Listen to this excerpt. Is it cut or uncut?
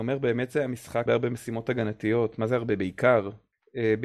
cut